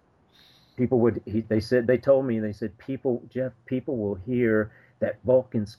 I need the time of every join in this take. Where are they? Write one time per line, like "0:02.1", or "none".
none